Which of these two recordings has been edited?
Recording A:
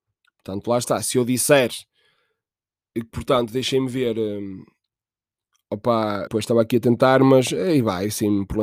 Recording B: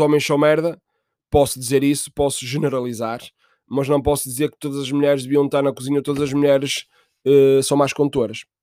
A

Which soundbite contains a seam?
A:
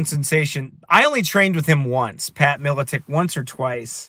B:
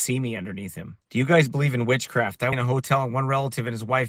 B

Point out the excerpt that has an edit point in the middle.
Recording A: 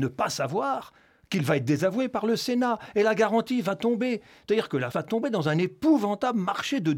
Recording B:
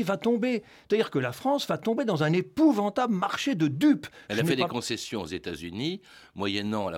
A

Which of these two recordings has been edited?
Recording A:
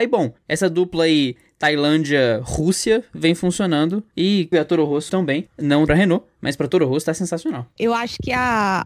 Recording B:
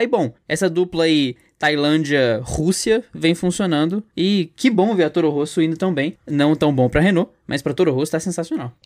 A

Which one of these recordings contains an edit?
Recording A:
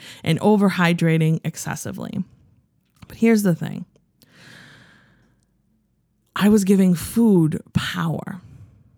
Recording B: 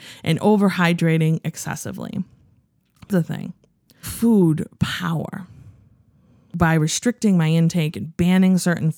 B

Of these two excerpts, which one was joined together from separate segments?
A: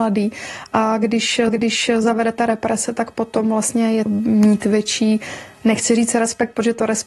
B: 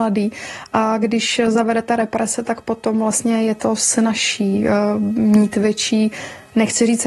A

